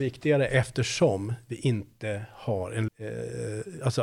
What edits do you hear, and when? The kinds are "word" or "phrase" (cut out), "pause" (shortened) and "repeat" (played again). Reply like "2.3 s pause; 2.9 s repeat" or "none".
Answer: 2.9 s word

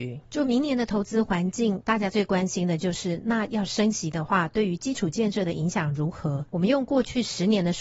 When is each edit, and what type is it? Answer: 6.5 s pause

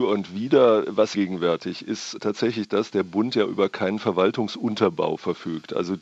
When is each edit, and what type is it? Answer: 1.1 s phrase; 2.9 s word

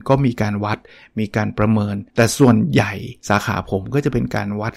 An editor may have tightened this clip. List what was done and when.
2.1 s pause; 3.2 s pause

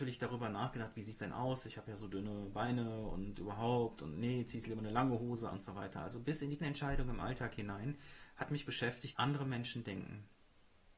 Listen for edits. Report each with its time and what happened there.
1.2 s word; 5.5 s word; 6.6 s word; 9.1 s word

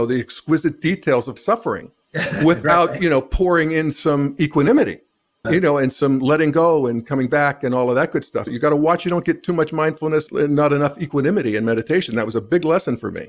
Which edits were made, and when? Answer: 1.4 s word; 5.4 s word; 8.5 s word; 10.3 s word

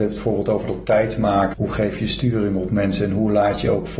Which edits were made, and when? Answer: 1.5 s word

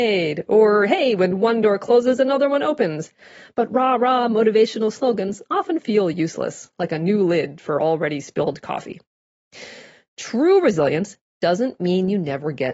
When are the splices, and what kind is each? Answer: none

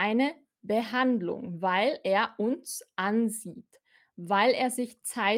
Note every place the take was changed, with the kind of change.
none

